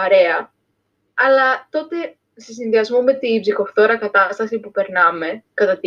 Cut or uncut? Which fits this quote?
uncut